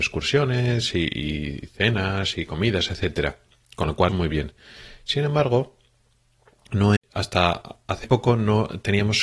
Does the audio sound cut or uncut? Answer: cut